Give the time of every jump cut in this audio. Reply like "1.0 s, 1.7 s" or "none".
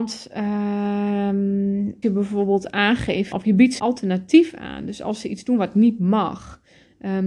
2.0 s, 3.3 s, 3.8 s